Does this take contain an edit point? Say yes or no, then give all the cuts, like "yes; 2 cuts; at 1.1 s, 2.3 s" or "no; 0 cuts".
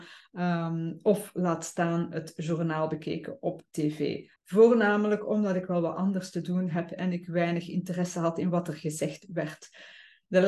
yes; 1 cut; at 4.4 s